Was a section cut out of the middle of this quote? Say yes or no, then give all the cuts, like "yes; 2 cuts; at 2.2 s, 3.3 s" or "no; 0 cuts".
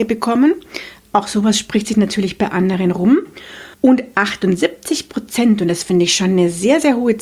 yes; 1 cut; at 3.7 s